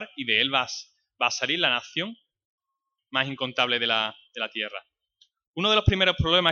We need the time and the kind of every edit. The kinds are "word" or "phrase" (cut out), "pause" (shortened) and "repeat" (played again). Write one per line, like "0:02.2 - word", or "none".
none